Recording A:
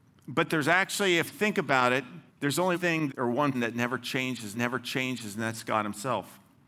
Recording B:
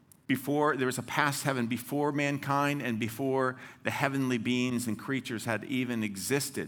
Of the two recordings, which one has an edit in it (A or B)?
A